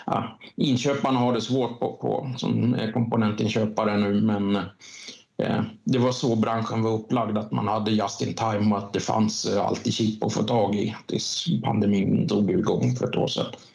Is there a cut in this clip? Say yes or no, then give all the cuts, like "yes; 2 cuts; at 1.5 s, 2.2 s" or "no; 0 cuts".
no; 0 cuts